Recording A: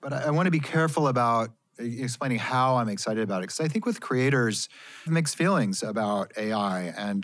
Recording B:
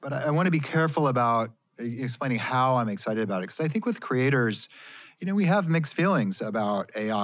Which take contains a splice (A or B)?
A